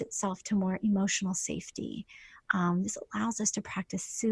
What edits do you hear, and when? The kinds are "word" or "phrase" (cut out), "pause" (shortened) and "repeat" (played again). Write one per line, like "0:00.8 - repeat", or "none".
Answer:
none